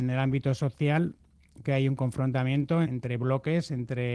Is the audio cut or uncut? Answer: cut